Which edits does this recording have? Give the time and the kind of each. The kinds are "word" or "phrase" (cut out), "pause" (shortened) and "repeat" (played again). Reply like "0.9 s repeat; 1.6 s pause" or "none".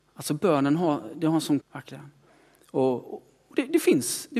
1.6 s word